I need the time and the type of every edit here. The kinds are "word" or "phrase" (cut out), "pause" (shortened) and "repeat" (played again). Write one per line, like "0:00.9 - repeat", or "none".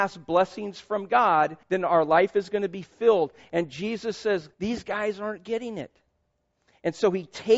0:01.6 - pause
0:04.5 - pause